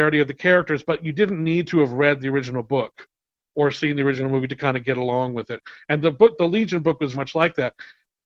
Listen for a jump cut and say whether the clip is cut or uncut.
cut